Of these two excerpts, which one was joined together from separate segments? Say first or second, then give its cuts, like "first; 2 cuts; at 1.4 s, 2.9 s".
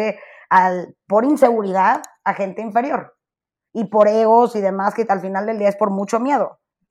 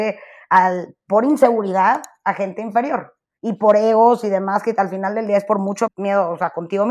second; 2 cuts; at 3.2 s, 5.9 s